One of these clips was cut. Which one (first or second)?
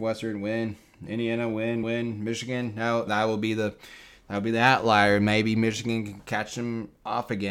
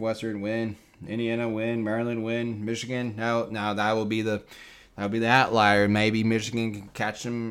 first